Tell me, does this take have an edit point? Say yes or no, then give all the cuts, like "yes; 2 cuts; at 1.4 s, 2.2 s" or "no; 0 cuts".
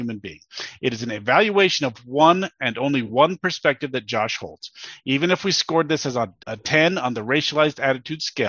yes; 1 cut; at 6.4 s